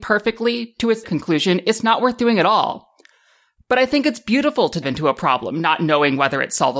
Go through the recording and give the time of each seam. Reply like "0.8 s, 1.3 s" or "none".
1.0 s, 4.8 s

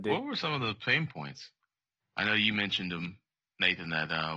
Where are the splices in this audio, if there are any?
none

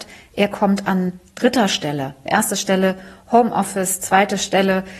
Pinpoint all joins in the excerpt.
2.3 s

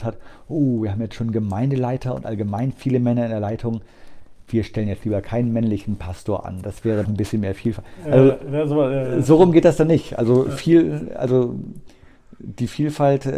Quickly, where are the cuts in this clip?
7.0 s

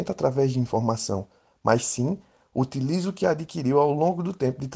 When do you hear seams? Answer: none

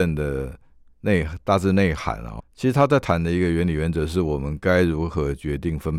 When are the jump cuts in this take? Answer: 2.4 s

